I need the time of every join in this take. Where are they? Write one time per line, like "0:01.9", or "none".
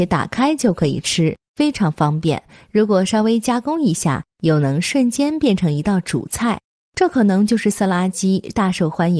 none